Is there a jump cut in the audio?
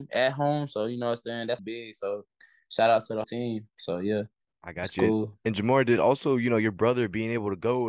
yes; 2 cuts; at 1.6 s, 3.2 s

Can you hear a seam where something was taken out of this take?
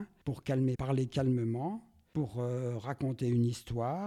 no; 0 cuts

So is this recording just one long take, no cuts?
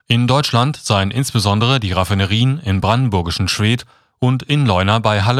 yes; 0 cuts

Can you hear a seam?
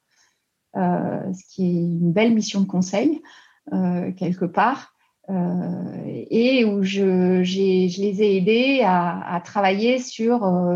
no; 0 cuts

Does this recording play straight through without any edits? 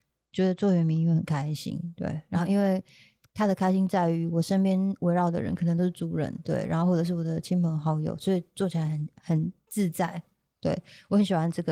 yes; 0 cuts

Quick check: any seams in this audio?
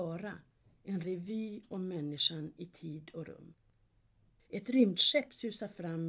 no; 0 cuts

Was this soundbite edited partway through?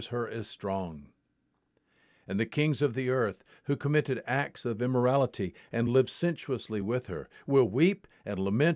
no; 0 cuts

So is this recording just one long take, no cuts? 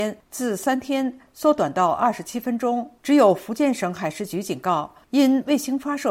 no; 1 cut; at 3.0 s

